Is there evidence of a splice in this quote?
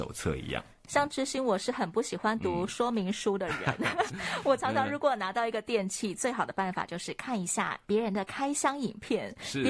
yes; 2 cuts; at 4.1 s, 7.8 s

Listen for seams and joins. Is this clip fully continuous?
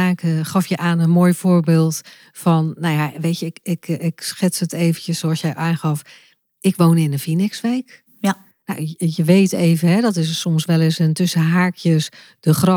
yes; 0 cuts

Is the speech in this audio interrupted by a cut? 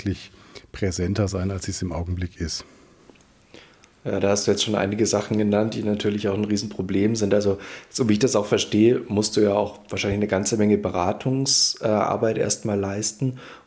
no; 0 cuts

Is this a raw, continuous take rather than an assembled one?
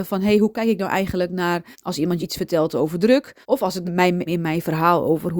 no; 5 cuts; at 1.7 s, 2.2 s, 3.4 s, 3.8 s, 4.3 s

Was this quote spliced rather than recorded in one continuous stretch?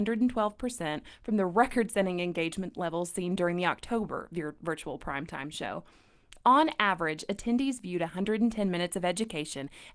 no; 0 cuts

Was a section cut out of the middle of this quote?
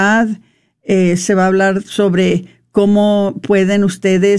no; 0 cuts

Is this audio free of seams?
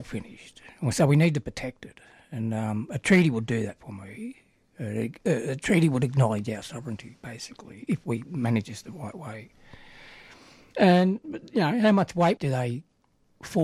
yes; 0 cuts

